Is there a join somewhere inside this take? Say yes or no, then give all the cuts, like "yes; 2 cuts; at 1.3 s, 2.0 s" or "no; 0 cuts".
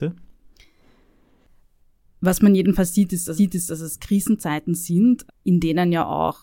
yes; 2 cuts; at 3.4 s, 5.3 s